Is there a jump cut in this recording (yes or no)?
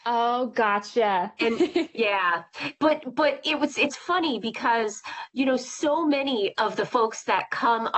no